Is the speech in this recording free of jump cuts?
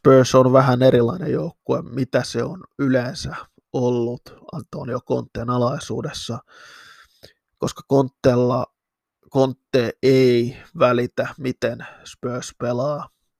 yes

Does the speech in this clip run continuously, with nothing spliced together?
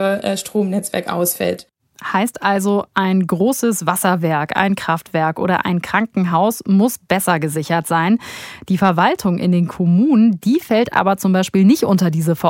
yes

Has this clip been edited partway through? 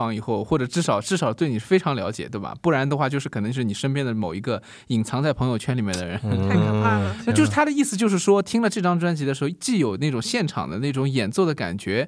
no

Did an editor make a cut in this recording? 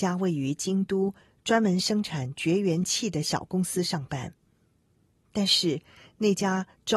no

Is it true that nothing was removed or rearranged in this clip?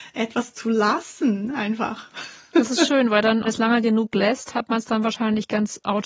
no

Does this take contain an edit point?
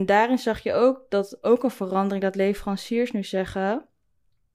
no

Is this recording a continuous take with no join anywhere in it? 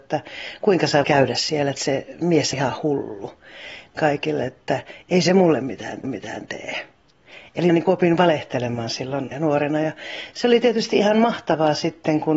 no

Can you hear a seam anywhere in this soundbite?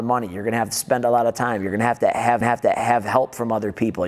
yes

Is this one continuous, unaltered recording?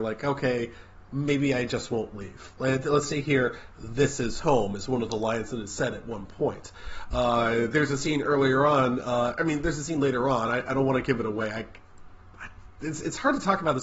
yes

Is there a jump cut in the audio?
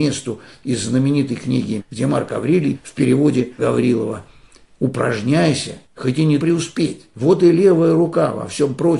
yes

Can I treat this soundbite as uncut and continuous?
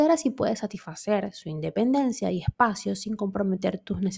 yes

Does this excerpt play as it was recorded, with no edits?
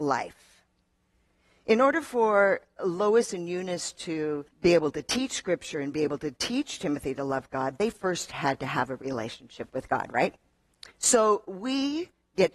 no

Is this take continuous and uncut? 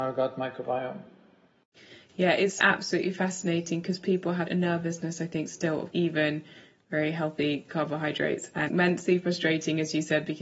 no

